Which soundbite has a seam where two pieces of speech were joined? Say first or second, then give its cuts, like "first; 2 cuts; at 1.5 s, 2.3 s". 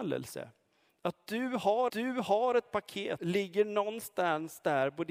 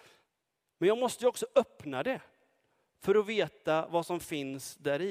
first; 2 cuts; at 1.9 s, 3.2 s